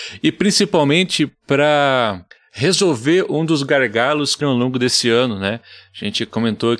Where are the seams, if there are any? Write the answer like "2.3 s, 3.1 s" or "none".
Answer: 2.3 s, 4.4 s